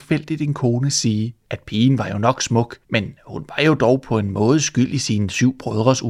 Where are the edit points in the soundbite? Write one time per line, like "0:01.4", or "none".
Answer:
0:01.4
0:02.8